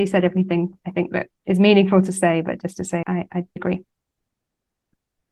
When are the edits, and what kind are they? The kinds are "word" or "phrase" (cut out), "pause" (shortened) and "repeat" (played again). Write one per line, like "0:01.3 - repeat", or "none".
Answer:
0:03.0 - word
0:03.6 - word